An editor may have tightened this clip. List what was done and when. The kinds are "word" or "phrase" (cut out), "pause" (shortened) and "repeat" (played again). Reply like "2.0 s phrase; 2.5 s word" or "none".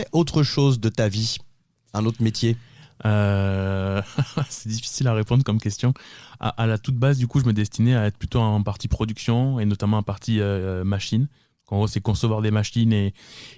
none